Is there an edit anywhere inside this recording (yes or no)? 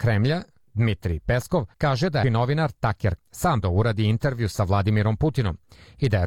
yes